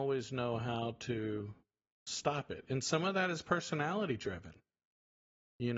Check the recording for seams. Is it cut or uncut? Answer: uncut